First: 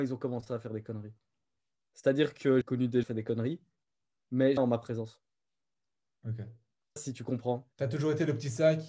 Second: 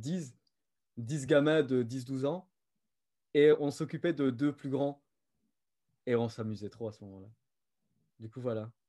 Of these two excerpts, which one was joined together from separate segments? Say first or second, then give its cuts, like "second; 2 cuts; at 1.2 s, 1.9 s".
first; 5 cuts; at 2.6 s, 3.0 s, 4.6 s, 7.0 s, 7.7 s